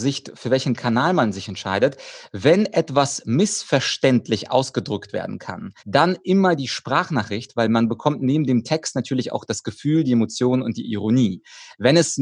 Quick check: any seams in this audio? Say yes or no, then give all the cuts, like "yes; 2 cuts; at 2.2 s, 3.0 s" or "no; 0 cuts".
yes; 1 cut; at 5.8 s